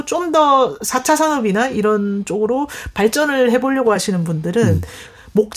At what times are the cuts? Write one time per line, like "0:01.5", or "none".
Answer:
none